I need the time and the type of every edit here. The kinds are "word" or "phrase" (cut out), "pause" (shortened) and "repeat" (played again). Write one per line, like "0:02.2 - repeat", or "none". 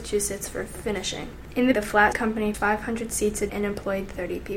0:01.7 - word
0:02.1 - word
0:02.5 - word
0:03.5 - word